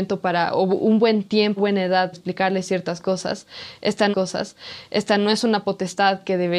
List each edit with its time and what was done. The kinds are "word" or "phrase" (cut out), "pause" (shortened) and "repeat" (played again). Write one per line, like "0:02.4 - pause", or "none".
0:01.6 - word
0:02.1 - word
0:04.1 - repeat